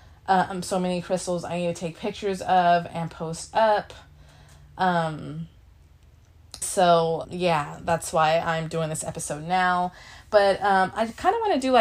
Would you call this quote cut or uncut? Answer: cut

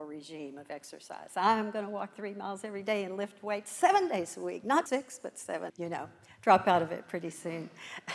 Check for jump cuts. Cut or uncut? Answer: cut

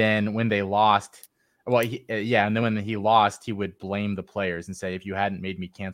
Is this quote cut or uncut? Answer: uncut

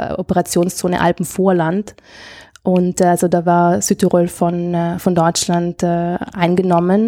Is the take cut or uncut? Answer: uncut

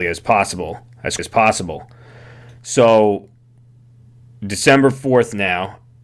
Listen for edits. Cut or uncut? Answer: cut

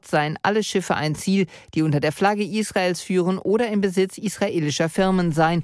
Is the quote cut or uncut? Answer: uncut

